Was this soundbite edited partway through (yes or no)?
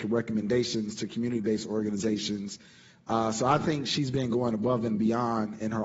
no